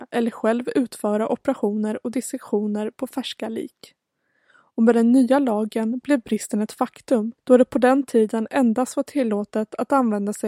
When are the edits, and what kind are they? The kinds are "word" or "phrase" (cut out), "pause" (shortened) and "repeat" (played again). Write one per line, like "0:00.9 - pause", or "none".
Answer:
0:07.4 - pause